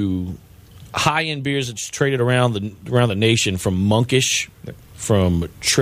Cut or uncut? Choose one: uncut